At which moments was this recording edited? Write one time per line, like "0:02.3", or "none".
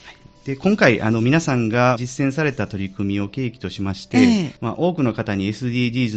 0:02.0
0:04.6